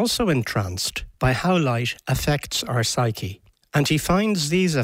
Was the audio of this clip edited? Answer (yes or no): yes